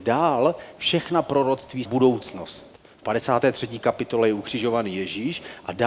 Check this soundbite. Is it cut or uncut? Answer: cut